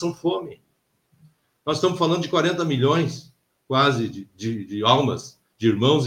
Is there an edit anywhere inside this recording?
no; 0 cuts

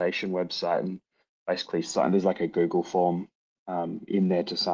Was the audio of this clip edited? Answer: no; 0 cuts

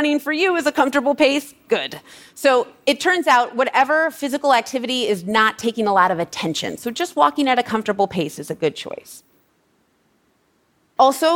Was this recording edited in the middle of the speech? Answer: no; 0 cuts

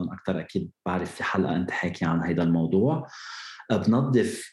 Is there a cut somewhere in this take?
no; 0 cuts

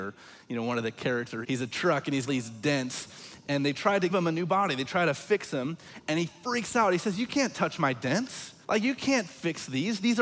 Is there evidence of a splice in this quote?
yes; 4 cuts; at 1.4 s, 2.3 s, 4.1 s, 8.6 s

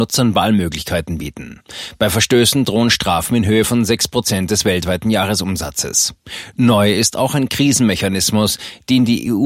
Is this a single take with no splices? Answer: yes; 0 cuts

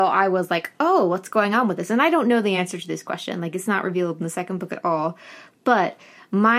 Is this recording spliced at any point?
no; 0 cuts

